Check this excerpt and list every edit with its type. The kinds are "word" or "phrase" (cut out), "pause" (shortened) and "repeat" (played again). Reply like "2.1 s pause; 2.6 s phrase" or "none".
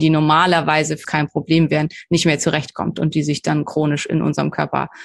1.0 s word